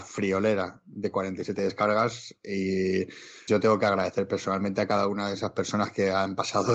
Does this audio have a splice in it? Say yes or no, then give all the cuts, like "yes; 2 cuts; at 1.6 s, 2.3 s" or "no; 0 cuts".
yes; 1 cut; at 3.5 s